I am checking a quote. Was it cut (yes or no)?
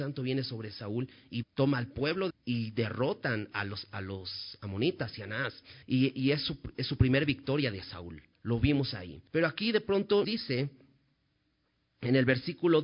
yes